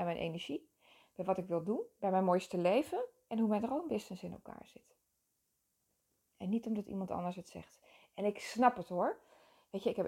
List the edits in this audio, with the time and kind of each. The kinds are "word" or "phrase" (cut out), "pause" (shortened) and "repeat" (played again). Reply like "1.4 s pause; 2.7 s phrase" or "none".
none